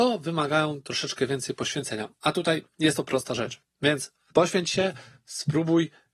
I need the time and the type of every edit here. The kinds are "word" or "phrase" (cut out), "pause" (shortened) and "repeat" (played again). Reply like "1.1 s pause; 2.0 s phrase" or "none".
none